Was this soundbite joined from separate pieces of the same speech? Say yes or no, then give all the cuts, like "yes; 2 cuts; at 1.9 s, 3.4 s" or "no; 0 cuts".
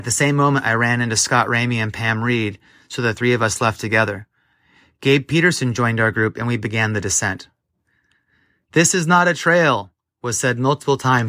no; 0 cuts